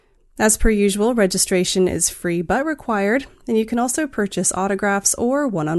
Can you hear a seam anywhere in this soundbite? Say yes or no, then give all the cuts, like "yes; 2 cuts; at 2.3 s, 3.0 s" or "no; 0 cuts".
no; 0 cuts